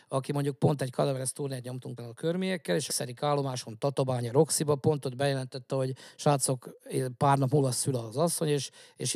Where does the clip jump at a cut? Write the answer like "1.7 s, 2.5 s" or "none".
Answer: 2.0 s, 2.9 s